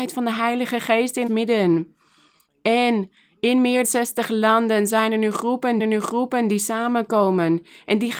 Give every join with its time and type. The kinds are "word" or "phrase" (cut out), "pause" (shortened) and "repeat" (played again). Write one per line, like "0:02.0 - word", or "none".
0:01.3 - word
0:03.8 - word
0:05.8 - repeat